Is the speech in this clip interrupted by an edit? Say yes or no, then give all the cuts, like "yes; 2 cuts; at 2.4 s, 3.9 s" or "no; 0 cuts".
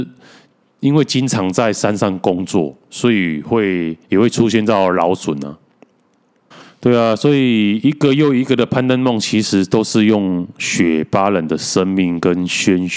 yes; 2 cuts; at 4.0 s, 6.5 s